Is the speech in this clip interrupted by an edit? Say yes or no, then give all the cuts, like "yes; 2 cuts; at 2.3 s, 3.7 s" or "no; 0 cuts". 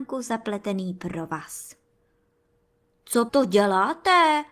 yes; 1 cut; at 3.3 s